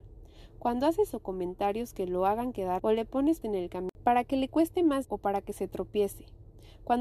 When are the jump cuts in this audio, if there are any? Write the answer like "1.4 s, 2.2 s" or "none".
1.1 s, 2.8 s, 3.4 s, 5.0 s